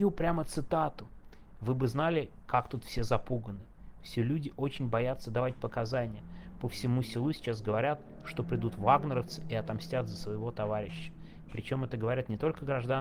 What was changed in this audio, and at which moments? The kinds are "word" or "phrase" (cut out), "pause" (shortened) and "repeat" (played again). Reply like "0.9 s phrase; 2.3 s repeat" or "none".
none